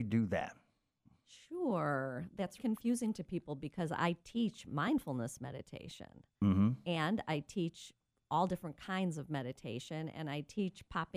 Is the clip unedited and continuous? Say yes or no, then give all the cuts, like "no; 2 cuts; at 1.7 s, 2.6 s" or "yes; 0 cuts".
no; 1 cut; at 2.6 s